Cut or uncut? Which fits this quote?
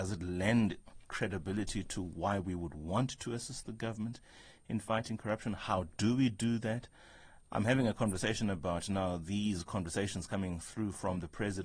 uncut